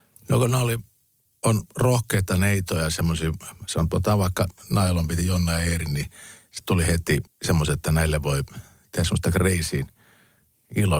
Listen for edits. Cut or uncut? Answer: cut